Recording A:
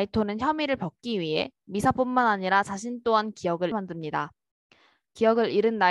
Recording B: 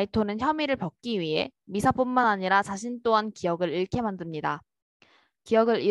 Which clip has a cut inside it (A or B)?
A